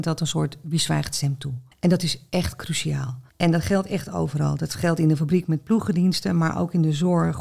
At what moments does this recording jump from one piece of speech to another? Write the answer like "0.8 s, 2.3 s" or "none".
1.7 s, 3.3 s